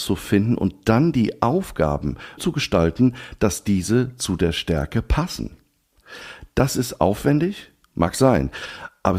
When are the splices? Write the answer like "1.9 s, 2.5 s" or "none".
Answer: 2.4 s